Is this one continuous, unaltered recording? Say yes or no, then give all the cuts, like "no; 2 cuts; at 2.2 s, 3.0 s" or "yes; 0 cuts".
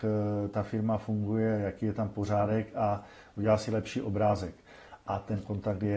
yes; 0 cuts